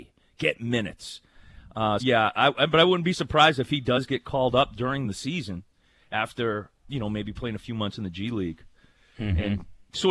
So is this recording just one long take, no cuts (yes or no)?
no